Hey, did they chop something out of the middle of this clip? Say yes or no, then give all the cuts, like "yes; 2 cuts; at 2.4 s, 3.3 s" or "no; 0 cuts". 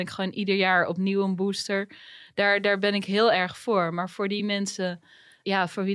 no; 0 cuts